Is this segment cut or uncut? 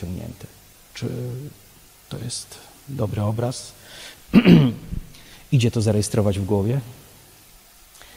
uncut